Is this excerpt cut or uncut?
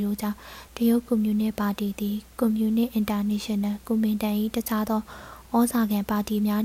cut